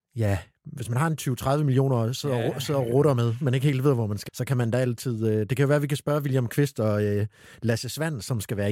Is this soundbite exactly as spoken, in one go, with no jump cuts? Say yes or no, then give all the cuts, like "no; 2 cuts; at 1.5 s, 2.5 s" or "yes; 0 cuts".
no; 1 cut; at 4.3 s